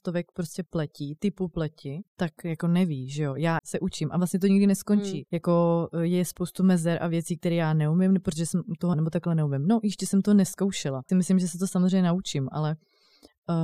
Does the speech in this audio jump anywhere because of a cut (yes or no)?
yes